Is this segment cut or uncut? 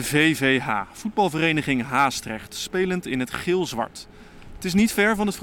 uncut